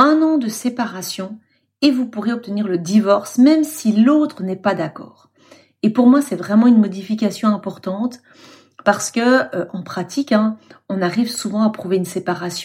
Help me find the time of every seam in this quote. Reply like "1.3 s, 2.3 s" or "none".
none